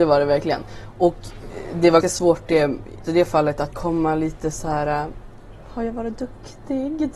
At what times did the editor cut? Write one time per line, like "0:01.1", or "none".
0:02.0
0:03.0
0:03.7